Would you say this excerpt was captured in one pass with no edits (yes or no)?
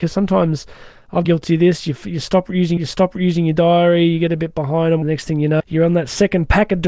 no